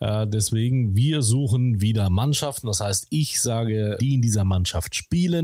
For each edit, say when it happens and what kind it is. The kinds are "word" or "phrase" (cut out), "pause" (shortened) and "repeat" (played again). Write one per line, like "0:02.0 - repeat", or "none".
0:04.0 - word